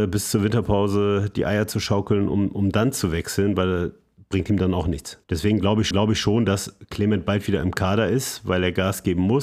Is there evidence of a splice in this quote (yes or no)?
yes